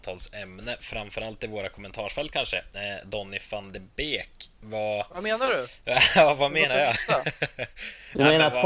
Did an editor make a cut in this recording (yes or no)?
no